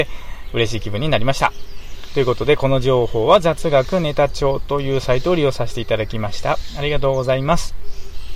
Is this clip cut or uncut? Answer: uncut